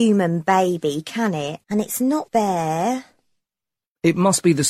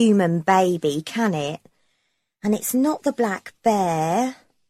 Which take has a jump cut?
first; 2 cuts; at 1.6 s, 2.3 s

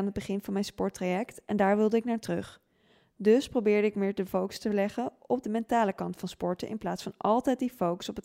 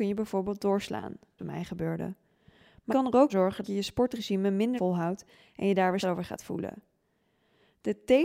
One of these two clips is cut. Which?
second; 6 cuts; at 1.4 s, 2.9 s, 3.3 s, 3.6 s, 4.8 s, 6.0 s

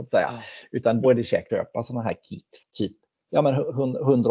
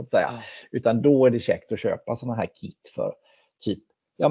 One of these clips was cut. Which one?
first; 3 cuts; at 1.0 s, 1.5 s, 2.6 s

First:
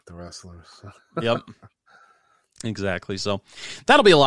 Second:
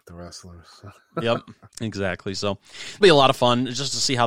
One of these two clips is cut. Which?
second; 2 cuts; at 1.7 s, 3.0 s

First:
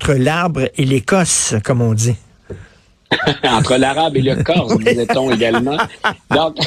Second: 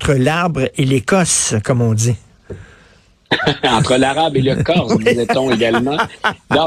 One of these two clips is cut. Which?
first; 1 cut; at 2.7 s

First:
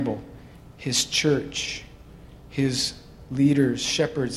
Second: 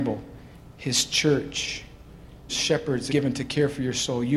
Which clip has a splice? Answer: second; 2 cuts; at 2.5 s, 3.1 s

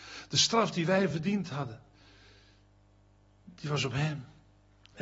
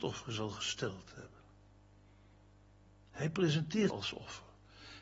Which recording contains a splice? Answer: second; 1 cut; at 3.9 s

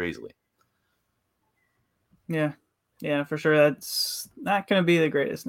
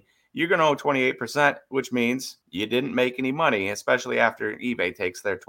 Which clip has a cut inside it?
second; 1 cut; at 2.4 s

